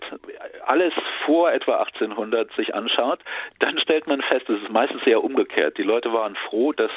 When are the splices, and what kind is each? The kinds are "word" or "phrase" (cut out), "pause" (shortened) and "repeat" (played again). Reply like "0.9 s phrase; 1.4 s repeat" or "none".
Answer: none